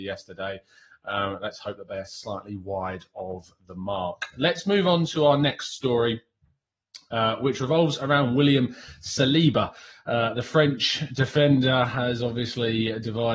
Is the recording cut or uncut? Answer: uncut